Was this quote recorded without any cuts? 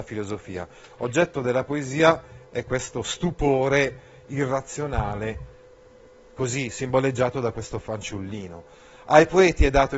yes; 0 cuts

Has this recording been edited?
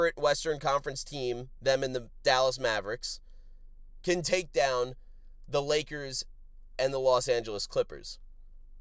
no; 0 cuts

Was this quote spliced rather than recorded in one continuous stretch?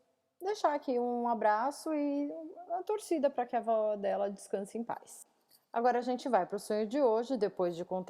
no; 0 cuts

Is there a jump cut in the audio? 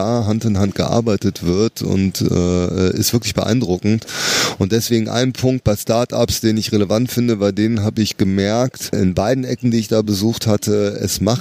no; 0 cuts

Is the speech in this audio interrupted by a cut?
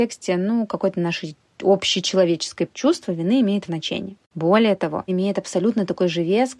yes; 3 cuts; at 2.7 s, 3.7 s, 5.1 s

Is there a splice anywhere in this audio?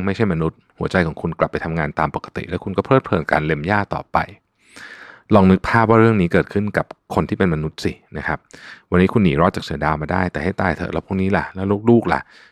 no; 0 cuts

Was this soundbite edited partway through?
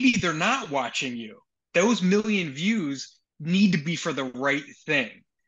no; 0 cuts

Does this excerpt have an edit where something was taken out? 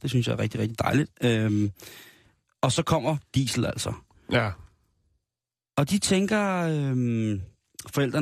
no; 0 cuts

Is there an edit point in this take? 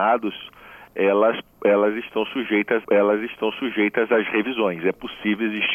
yes; 1 cut; at 2.8 s

